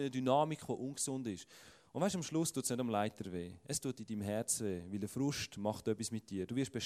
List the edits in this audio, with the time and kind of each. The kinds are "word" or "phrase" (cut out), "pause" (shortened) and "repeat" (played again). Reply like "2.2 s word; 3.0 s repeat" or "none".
none